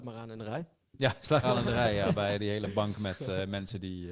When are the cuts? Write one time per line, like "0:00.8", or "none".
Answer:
0:01.4